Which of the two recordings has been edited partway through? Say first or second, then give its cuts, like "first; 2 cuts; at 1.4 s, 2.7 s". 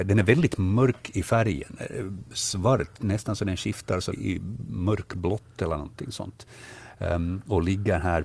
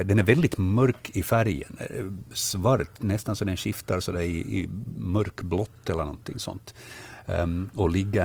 first; 1 cut; at 4.1 s